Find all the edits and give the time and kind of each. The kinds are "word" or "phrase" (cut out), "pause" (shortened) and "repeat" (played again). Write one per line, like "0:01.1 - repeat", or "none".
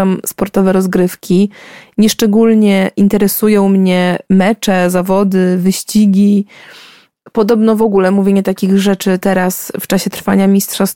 none